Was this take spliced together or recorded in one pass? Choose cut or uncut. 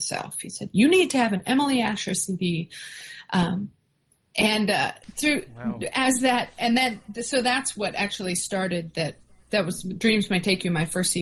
uncut